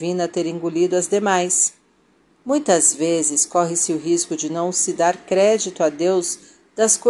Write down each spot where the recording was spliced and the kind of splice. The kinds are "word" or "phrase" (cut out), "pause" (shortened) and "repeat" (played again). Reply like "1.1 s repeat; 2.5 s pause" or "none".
none